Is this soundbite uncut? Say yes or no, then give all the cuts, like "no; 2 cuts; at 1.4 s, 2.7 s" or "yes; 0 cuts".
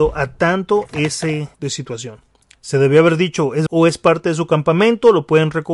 no; 2 cuts; at 1.5 s, 3.7 s